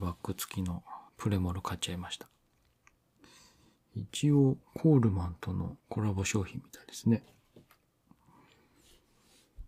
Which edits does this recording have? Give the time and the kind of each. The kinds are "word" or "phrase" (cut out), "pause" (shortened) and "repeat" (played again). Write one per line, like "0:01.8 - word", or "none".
0:01.1 - pause
0:04.6 - pause
0:05.8 - pause